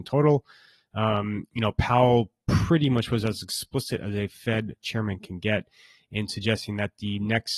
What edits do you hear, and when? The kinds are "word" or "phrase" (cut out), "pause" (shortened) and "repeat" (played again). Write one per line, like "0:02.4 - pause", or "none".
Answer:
none